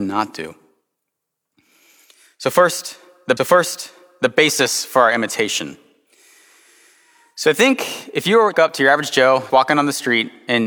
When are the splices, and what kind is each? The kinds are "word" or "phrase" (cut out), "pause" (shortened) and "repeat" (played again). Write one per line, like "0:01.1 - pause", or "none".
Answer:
0:03.4 - repeat
0:08.5 - phrase
0:09.5 - word